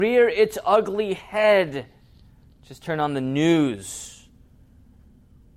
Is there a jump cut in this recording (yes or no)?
no